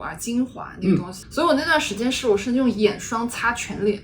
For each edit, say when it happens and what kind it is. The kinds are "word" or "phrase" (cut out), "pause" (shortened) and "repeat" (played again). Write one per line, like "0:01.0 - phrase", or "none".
0:01.2 - phrase